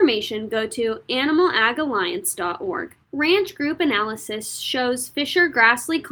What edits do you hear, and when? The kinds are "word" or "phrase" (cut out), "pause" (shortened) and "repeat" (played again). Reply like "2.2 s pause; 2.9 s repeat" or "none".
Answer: 3.0 s pause